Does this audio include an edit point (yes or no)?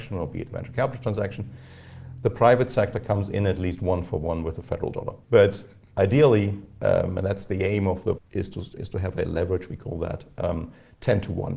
yes